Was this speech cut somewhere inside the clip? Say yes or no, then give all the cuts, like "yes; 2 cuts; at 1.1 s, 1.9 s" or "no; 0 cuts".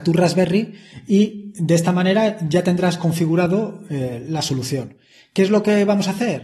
no; 0 cuts